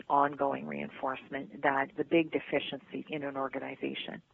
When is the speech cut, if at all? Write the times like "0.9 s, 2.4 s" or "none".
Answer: 1.9 s, 3.1 s

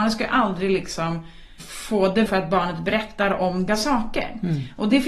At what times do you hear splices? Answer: 1.6 s, 2.3 s, 3.7 s

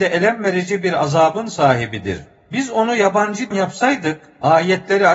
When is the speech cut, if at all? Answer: 3.5 s

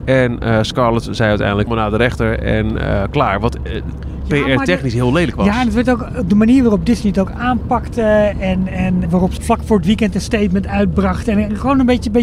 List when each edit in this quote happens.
1.7 s, 9.1 s, 9.4 s

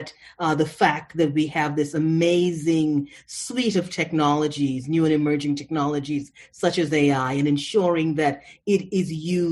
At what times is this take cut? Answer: none

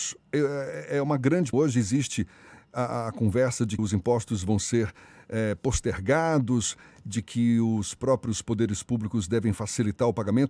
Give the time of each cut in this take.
1.5 s, 3.8 s

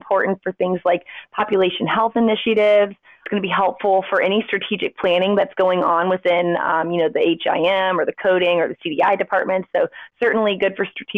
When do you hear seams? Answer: none

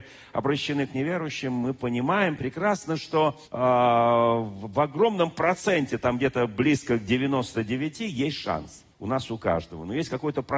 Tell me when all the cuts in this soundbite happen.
3.4 s, 8.9 s

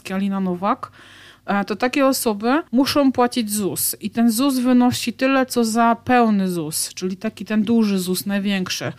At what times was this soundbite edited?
2.7 s

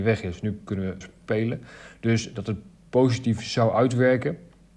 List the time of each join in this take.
1.0 s

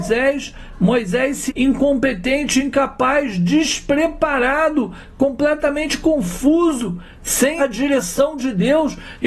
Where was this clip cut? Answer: 1.5 s, 7.6 s

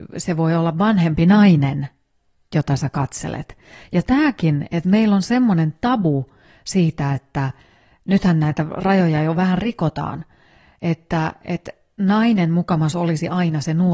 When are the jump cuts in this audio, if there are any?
none

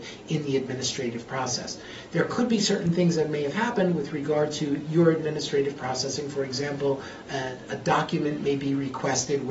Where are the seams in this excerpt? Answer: none

